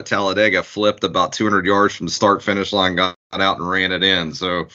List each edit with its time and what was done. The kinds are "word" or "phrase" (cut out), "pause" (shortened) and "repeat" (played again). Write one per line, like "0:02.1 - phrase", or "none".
0:03.2 - pause